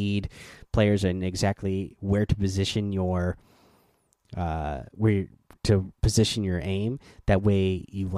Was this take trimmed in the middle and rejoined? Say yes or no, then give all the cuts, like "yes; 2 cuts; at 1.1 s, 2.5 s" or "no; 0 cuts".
no; 0 cuts